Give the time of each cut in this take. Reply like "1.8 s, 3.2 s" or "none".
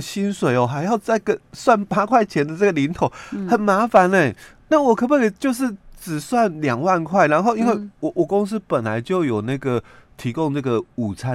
none